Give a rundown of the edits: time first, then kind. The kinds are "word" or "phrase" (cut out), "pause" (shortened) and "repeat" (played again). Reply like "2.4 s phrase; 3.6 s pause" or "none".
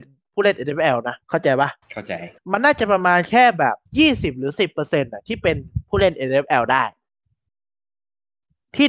1.2 s pause; 1.8 s pause; 2.4 s pause; 3.9 s pause